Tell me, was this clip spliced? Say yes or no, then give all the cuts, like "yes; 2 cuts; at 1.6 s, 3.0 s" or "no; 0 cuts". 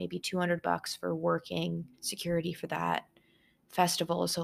yes; 1 cut; at 1.9 s